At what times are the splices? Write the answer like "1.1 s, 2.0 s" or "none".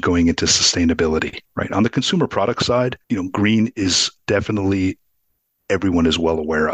1.5 s, 3.0 s